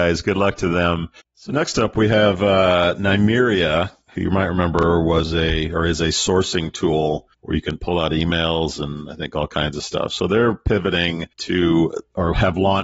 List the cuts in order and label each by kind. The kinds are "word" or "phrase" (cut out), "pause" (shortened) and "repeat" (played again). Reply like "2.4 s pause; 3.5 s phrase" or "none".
1.2 s pause; 7.3 s pause; 11.3 s pause

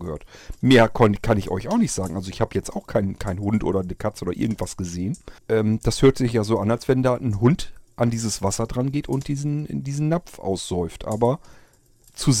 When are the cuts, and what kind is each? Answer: 5.4 s pause

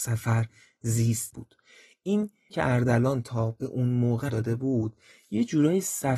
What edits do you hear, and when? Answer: 1.3 s word; 2.5 s word; 4.3 s word

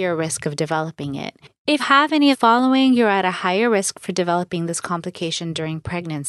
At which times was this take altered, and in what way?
1.8 s word; 2.3 s phrase

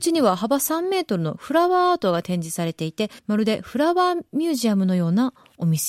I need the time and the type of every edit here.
3.2 s pause

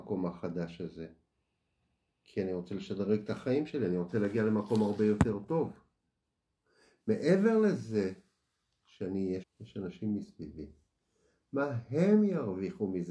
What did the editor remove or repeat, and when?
9.4 s word

